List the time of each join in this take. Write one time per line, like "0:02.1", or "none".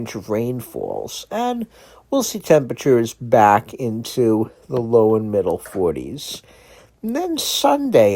none